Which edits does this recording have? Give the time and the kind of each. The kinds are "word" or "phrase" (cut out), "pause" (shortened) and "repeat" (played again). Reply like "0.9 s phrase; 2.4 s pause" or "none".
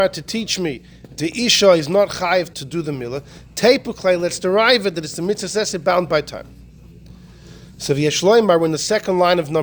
2.5 s word